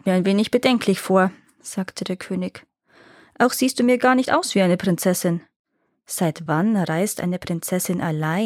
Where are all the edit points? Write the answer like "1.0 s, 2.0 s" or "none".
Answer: none